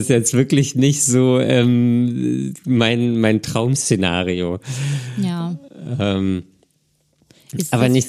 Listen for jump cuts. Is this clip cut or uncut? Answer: uncut